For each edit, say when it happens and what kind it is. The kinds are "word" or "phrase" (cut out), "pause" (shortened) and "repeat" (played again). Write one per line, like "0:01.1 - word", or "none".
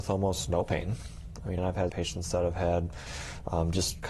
0:01.6 - word
0:01.9 - word